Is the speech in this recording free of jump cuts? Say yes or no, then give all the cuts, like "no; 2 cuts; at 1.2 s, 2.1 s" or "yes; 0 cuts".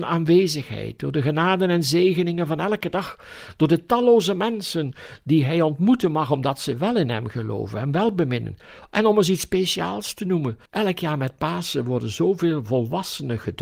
no; 1 cut; at 10.7 s